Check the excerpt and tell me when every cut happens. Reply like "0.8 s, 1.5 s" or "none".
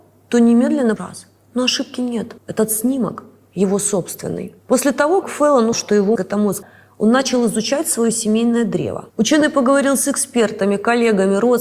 1.0 s, 2.4 s, 4.6 s, 5.2 s, 5.7 s, 6.2 s, 6.6 s, 9.1 s